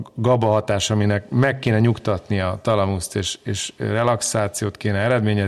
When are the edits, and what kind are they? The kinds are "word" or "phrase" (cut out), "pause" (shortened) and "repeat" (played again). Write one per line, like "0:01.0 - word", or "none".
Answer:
none